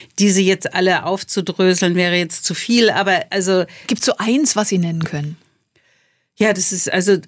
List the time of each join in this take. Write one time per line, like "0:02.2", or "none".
none